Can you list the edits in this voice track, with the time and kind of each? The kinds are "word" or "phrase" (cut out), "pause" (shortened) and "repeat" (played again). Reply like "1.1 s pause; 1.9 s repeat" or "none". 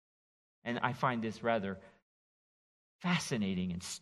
none